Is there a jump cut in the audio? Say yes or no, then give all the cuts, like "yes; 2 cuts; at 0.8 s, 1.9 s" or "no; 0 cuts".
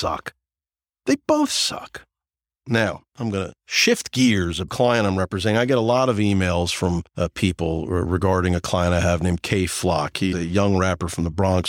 yes; 5 cuts; at 3.1 s, 3.6 s, 4.7 s, 7.1 s, 10.3 s